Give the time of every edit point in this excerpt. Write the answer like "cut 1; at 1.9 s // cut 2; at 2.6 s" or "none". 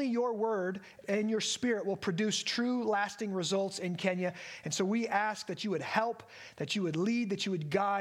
cut 1; at 1.0 s